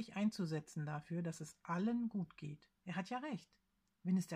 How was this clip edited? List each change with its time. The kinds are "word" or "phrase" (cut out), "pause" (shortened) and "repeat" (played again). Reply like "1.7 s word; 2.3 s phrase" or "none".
2.8 s pause